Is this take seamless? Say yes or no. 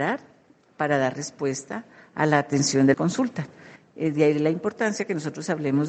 no